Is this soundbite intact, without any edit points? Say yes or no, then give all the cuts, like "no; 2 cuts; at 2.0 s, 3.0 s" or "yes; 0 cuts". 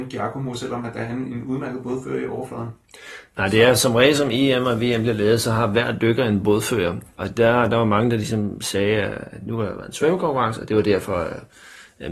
yes; 0 cuts